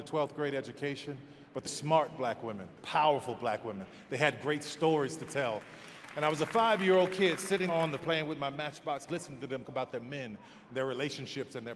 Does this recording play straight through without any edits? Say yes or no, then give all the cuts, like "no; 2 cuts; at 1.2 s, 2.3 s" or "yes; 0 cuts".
no; 6 cuts; at 1.7 s, 2.8 s, 7.7 s, 8.0 s, 9.1 s, 9.6 s